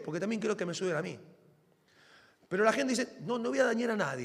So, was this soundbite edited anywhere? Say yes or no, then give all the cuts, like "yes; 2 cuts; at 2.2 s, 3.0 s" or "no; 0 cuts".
no; 0 cuts